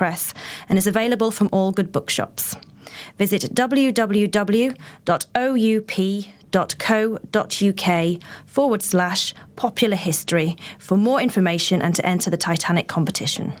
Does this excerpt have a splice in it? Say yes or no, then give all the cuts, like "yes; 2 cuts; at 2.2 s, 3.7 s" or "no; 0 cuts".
no; 0 cuts